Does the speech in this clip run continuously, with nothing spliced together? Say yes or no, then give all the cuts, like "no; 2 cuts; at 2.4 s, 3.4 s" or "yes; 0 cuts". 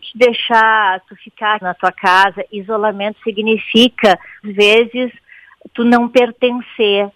no; 2 cuts; at 1.6 s, 4.4 s